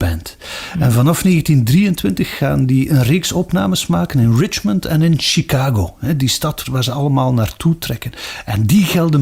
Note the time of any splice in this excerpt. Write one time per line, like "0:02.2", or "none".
0:06.6